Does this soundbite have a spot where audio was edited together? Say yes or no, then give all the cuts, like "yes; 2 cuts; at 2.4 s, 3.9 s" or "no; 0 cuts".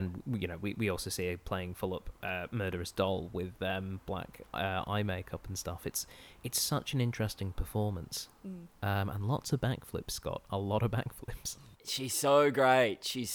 yes; 1 cut; at 11.7 s